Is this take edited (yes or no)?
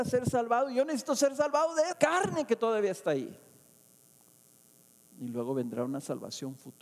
yes